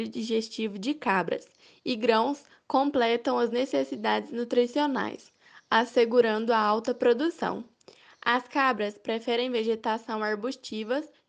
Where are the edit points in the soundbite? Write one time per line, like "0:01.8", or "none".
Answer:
none